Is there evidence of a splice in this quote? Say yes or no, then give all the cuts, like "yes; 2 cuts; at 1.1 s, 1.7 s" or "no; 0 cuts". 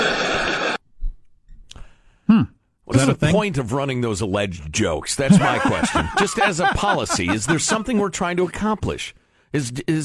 no; 0 cuts